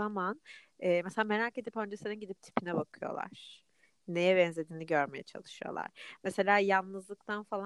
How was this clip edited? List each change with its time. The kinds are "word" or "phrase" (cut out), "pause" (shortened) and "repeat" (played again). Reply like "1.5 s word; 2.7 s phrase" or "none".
none